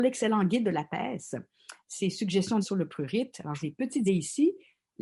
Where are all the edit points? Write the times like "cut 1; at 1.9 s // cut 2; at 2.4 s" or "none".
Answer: cut 1; at 2.6 s // cut 2; at 3.6 s // cut 3; at 4.1 s